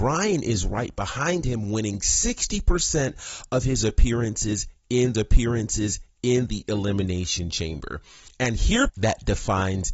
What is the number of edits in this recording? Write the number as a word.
two